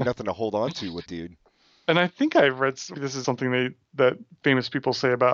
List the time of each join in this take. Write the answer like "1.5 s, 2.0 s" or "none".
1.1 s, 2.9 s, 3.2 s